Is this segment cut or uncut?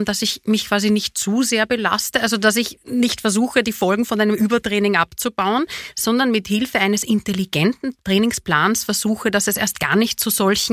uncut